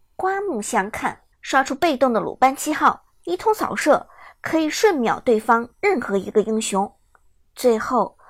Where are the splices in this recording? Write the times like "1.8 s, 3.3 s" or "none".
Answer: 1.3 s